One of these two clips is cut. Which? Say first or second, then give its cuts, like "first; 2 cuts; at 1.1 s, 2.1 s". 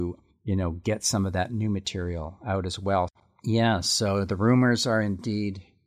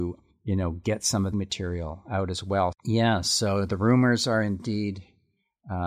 second; 2 cuts; at 1.3 s, 2.8 s